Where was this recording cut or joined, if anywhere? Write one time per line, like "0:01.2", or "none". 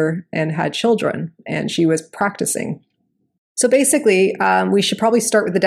none